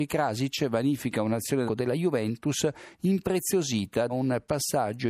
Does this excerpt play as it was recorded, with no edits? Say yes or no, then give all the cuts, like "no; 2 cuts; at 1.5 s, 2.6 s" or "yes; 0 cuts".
no; 2 cuts; at 1.7 s, 4.1 s